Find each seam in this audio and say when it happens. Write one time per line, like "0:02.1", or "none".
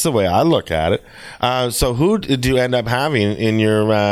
none